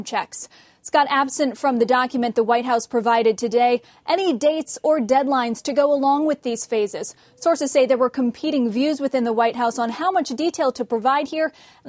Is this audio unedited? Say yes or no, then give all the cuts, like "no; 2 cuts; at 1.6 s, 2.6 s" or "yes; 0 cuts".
yes; 0 cuts